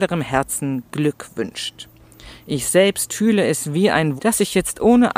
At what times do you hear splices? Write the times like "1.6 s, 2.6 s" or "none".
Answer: 4.2 s